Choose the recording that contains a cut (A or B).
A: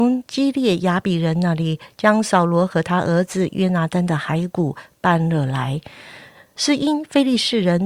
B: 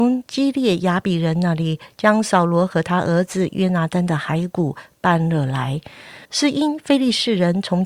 B